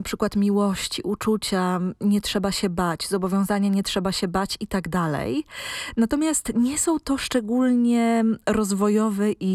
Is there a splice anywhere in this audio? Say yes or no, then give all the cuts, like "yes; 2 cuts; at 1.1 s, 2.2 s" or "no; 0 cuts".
no; 0 cuts